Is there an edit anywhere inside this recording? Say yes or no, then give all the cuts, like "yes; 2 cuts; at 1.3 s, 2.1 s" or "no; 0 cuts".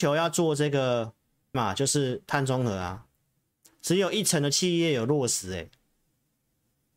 yes; 1 cut; at 1.5 s